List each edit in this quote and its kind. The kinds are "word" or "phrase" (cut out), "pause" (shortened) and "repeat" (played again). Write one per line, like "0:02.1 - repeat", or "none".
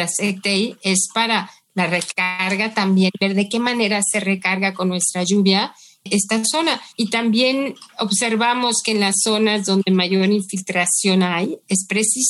0:06.9 - pause